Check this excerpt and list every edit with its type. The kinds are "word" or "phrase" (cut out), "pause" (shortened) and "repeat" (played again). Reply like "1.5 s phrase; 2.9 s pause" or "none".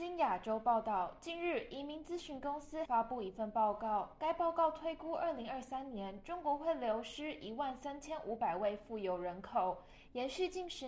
2.8 s phrase

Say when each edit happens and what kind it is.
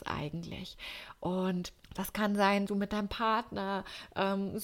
1.8 s pause; 2.7 s word

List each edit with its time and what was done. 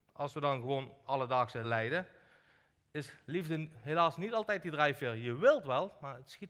1.0 s word; 1.6 s word

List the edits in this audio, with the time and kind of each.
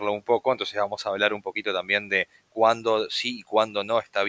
none

